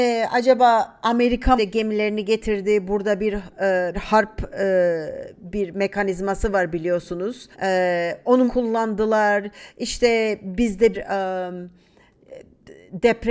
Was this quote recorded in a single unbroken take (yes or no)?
no